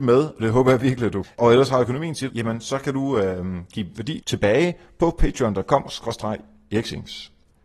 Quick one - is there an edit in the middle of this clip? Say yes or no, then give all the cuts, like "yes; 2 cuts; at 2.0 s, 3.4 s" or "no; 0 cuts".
yes; 2 cuts; at 1.2 s, 2.3 s